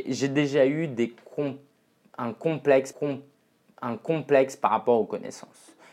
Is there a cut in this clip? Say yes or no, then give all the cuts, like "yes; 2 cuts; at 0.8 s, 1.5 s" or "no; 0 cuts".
yes; 1 cut; at 2.9 s